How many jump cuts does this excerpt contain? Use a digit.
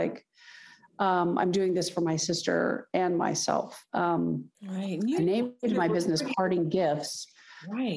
1